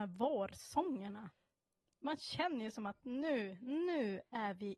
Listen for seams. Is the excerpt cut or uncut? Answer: uncut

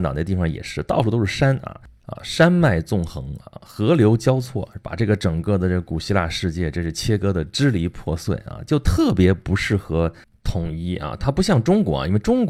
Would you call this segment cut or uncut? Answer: uncut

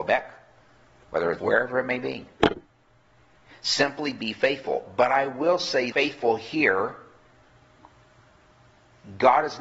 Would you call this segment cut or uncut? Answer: cut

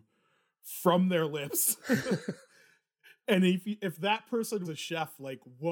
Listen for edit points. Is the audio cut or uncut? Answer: cut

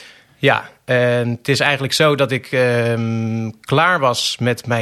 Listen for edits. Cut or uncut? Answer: uncut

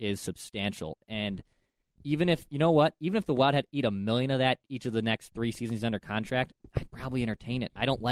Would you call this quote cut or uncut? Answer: uncut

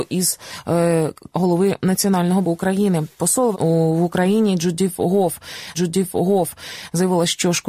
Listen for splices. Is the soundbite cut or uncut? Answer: cut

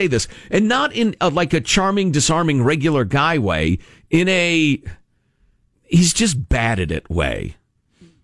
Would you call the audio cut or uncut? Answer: uncut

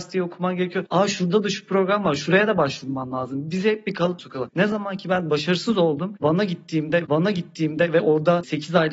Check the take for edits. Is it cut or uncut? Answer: cut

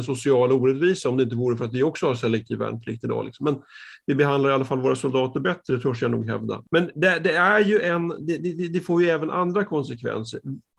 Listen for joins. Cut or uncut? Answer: uncut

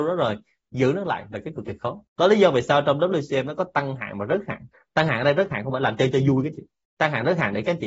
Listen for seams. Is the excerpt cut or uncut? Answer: cut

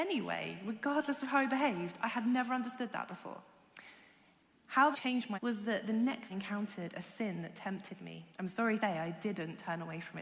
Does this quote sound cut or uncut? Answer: cut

